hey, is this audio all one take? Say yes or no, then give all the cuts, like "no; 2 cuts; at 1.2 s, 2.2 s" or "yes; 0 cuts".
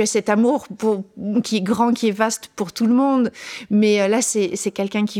yes; 0 cuts